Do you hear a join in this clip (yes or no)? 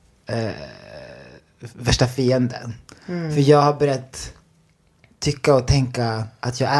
no